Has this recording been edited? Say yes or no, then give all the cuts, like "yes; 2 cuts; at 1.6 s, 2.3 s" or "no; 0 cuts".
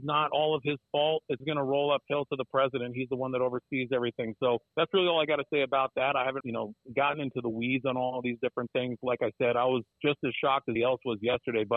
yes; 5 cuts; at 1.4 s, 4.7 s, 6.4 s, 9.9 s, 10.8 s